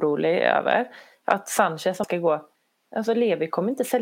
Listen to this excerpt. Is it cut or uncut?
cut